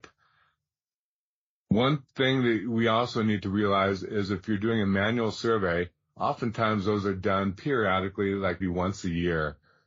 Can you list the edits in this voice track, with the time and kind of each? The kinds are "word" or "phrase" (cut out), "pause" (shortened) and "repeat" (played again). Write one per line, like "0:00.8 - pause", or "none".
0:08.6 - word